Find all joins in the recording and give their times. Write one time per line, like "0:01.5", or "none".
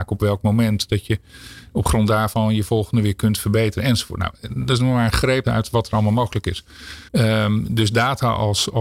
0:05.4
0:07.1